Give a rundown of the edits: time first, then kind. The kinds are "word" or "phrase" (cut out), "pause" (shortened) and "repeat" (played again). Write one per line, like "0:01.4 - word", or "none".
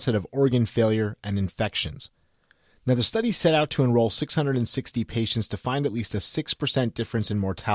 none